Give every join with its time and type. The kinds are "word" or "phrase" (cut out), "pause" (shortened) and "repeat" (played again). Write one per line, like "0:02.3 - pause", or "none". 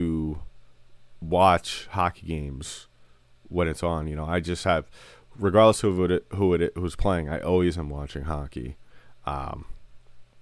none